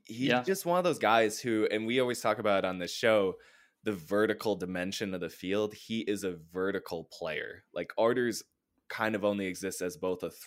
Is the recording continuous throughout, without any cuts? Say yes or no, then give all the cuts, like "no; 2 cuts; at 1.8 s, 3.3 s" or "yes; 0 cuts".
yes; 0 cuts